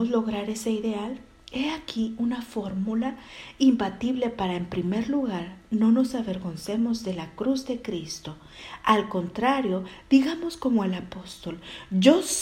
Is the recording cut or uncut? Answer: uncut